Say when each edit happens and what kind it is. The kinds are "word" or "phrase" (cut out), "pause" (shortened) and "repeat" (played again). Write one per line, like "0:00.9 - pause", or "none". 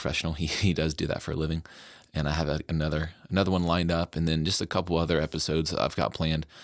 none